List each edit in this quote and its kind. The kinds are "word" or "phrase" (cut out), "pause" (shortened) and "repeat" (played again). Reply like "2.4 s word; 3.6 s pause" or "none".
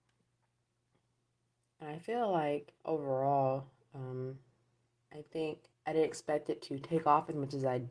2.8 s pause; 4.9 s pause; 5.7 s pause